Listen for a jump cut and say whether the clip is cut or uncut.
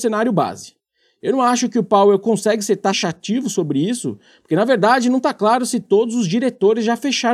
uncut